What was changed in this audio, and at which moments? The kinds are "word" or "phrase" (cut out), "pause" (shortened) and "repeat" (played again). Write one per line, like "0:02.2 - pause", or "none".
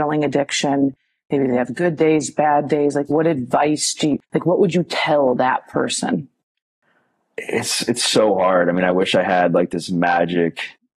0:04.2 - pause

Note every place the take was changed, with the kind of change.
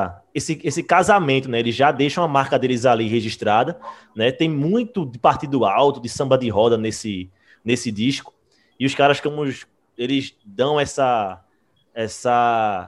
none

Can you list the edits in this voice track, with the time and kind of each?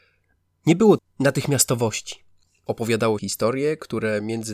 0:01.0 - word
0:03.2 - word

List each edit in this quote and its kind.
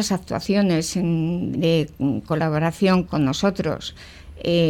0:01.5 - word
0:03.0 - word

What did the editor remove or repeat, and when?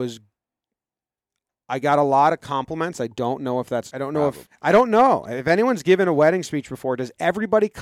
0:03.9 - phrase
0:04.5 - word

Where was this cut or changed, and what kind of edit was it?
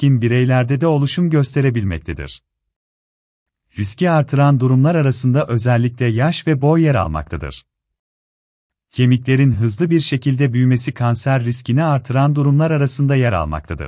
none

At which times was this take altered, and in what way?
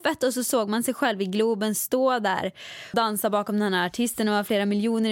0:02.9 - word

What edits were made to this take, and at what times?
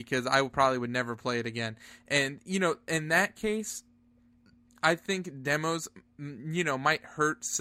none

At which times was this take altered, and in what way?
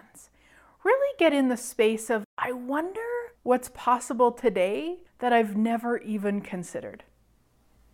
0:02.3 - pause
0:03.4 - pause
0:05.1 - pause

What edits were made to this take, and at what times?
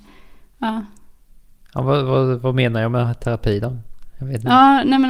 none

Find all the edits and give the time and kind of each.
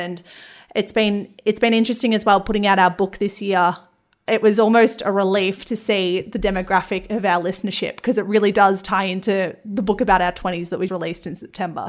0:10.9 - word

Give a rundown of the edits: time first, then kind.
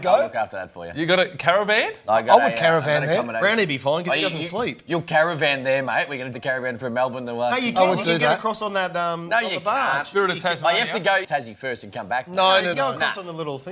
0:06.3 - word
0:11.2 - phrase
0:12.7 - phrase

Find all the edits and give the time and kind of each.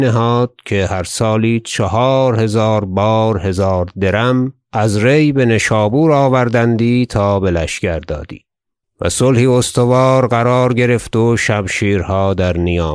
0:08.8 - pause

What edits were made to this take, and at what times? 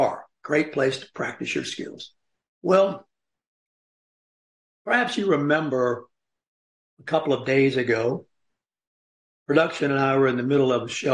none

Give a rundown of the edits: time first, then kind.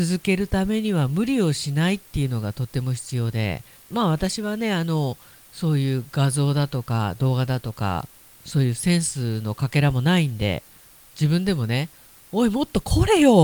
0:03.8 - pause

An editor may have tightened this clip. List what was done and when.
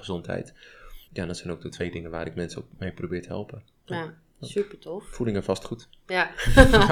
0:01.0 - pause

